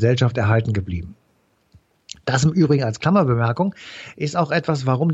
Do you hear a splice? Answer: no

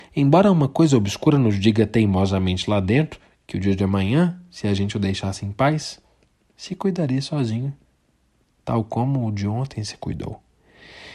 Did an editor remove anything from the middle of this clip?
no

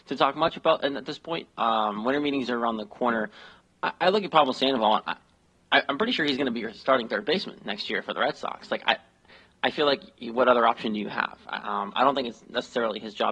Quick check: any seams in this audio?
no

